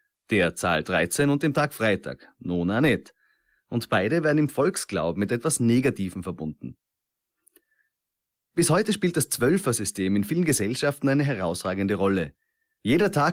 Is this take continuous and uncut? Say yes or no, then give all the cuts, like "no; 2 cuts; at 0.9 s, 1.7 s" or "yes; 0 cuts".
yes; 0 cuts